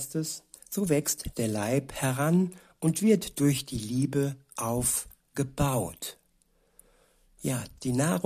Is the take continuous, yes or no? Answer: yes